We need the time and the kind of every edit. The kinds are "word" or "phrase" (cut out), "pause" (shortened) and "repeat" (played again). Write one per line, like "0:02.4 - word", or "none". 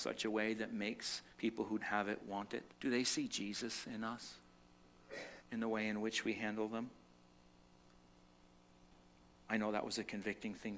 0:01.3 - pause
0:01.8 - word
0:02.7 - pause
0:05.4 - pause